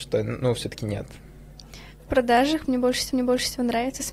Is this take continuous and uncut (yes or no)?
no